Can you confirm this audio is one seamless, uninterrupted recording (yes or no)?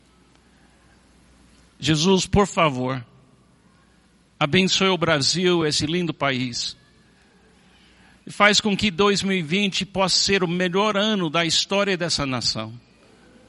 yes